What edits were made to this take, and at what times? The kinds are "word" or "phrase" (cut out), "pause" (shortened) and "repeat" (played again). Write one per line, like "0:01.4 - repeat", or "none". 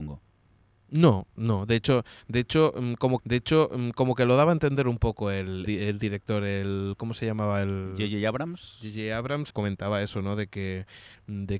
0:03.2 - repeat
0:05.6 - word
0:09.5 - word

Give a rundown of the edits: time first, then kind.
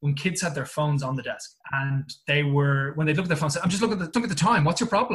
0:01.6 - pause
0:04.1 - word

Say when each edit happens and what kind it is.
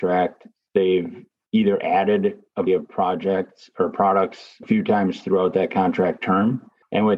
0:02.7 - word
0:04.6 - word

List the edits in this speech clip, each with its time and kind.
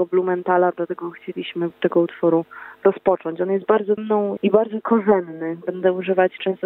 0:01.7 - word
0:04.0 - phrase
0:04.4 - word
0:04.8 - word

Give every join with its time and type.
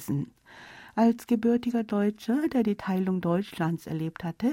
none

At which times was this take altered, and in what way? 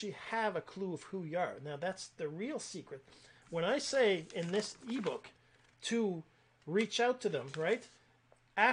none

